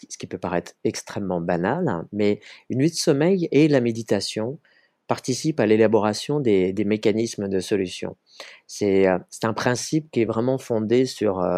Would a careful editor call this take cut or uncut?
uncut